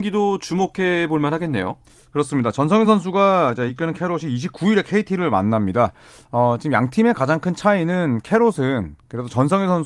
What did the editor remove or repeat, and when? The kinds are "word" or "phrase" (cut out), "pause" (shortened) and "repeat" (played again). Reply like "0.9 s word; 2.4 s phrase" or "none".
none